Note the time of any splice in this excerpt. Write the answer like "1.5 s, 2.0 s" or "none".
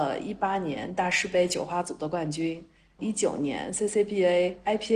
none